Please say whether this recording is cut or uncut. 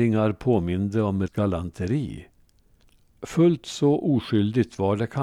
cut